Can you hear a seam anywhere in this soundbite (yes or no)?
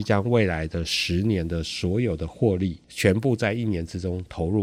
yes